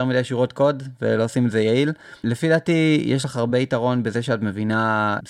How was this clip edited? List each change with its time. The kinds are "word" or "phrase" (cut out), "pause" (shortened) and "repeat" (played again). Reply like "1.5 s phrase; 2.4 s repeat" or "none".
none